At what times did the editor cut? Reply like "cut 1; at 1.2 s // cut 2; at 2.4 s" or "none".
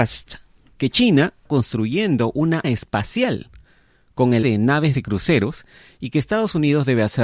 cut 1; at 1.5 s // cut 2; at 2.6 s // cut 3; at 4.4 s // cut 4; at 4.9 s